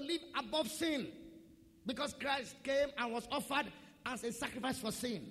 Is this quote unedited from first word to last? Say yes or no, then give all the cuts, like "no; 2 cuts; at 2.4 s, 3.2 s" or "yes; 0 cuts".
yes; 0 cuts